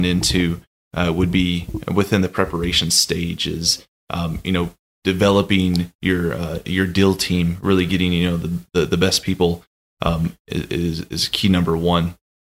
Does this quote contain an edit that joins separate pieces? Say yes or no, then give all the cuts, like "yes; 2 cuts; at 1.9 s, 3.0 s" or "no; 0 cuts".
no; 0 cuts